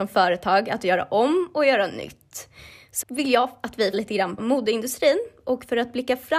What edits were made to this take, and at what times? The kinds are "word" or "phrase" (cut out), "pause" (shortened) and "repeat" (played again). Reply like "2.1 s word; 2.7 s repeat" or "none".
3.0 s word; 3.9 s word; 4.4 s word